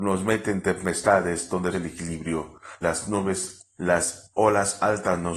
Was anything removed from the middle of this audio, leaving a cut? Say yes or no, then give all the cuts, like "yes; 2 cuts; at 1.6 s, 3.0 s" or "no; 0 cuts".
yes; 4 cuts; at 1.7 s, 2.8 s, 3.8 s, 4.3 s